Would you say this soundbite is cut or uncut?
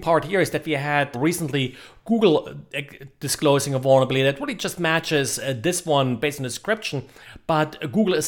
cut